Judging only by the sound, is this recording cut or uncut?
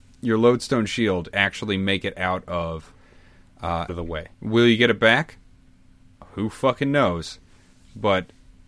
cut